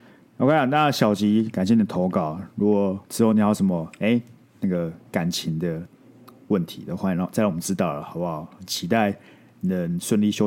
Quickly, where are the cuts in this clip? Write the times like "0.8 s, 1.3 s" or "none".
3.0 s